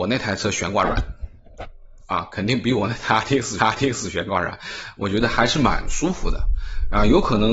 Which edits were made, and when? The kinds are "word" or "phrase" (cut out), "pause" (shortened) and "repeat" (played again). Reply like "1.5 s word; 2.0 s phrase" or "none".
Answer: 3.6 s repeat